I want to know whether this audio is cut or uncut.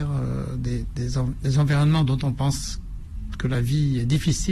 uncut